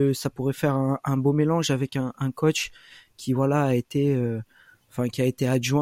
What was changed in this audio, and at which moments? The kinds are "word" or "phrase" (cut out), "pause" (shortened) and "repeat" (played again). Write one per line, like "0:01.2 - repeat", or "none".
none